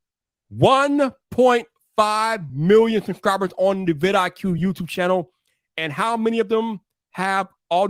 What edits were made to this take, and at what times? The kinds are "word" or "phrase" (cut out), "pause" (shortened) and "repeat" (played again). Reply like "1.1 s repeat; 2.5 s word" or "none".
none